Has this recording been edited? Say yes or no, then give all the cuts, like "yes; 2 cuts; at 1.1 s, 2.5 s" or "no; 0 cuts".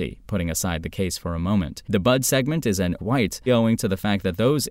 yes; 3 cuts; at 1.8 s, 3.0 s, 3.5 s